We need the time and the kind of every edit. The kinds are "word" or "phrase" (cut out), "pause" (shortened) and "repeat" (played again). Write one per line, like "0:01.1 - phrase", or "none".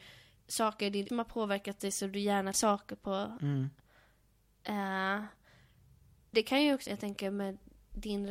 0:01.1 - word
0:02.5 - word
0:06.3 - word
0:06.9 - word

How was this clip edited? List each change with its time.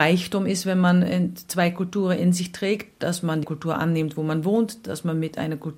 0:03.4 - word

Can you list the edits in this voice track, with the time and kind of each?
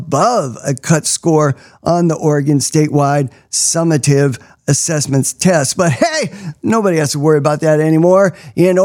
none

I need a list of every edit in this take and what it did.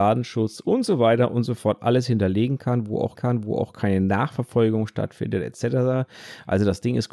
0:03.1 - repeat

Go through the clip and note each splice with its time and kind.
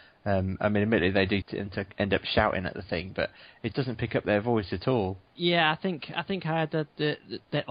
0:01.4 - word
0:03.7 - word
0:05.3 - pause

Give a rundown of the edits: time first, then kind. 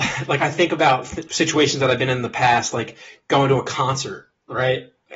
0:01.3 - word

